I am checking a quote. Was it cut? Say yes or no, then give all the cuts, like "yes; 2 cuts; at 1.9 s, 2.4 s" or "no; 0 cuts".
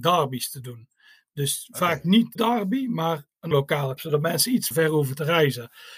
yes; 4 cuts; at 2.4 s, 3.5 s, 4.0 s, 4.7 s